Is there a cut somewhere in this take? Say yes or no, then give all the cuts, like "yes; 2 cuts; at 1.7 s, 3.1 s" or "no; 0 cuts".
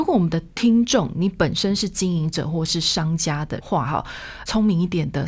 no; 0 cuts